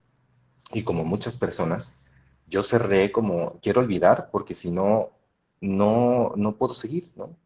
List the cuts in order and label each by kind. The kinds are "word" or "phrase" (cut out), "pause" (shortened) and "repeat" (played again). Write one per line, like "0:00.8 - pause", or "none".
none